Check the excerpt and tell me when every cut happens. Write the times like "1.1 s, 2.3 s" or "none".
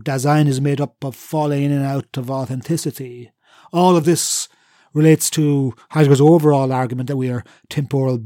none